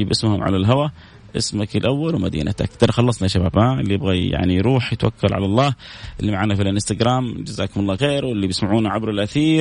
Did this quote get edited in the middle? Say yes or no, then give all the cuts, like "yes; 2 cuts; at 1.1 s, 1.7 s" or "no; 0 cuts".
yes; 1 cut; at 8.0 s